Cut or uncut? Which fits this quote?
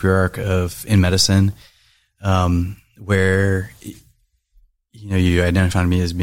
uncut